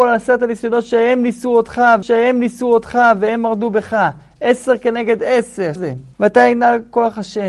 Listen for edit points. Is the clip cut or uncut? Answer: cut